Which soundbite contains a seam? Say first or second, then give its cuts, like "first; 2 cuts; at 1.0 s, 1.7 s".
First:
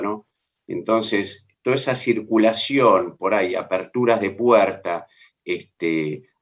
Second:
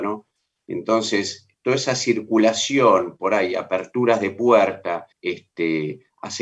second; 1 cut; at 5.1 s